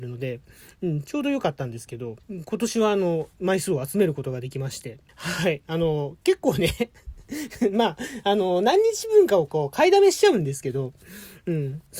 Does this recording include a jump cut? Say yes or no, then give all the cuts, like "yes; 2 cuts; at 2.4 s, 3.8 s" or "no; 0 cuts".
yes; 2 cuts; at 2.2 s, 5.1 s